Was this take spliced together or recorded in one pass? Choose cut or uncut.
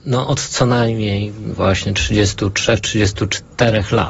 uncut